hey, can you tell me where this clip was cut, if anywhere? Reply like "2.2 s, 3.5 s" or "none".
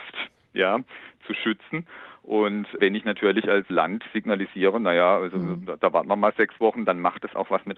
2.8 s, 3.7 s